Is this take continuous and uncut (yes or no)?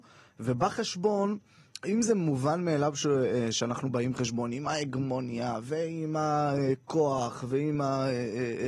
yes